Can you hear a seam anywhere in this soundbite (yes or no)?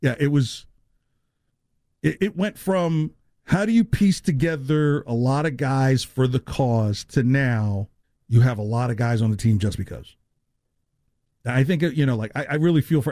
yes